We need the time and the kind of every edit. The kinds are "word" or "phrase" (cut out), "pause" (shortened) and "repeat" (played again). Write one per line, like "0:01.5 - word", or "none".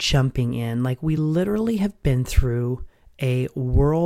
none